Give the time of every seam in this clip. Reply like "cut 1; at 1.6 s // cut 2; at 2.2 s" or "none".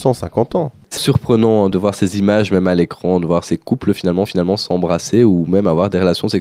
cut 1; at 1.0 s // cut 2; at 4.3 s